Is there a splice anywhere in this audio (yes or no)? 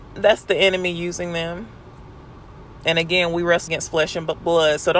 yes